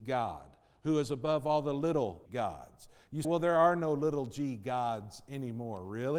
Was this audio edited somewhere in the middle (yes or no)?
yes